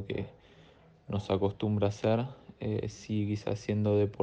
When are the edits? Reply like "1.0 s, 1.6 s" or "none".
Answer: none